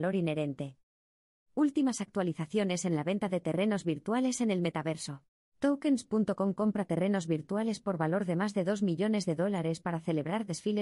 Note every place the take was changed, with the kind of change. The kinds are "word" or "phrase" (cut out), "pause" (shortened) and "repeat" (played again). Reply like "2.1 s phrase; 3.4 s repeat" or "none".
5.4 s pause